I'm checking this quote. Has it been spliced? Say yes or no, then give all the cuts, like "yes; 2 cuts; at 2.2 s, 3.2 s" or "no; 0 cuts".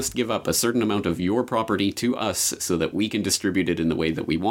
no; 0 cuts